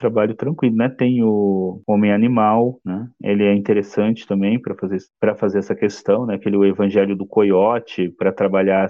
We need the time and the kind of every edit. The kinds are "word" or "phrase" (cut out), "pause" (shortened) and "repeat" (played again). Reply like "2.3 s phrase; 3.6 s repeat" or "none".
none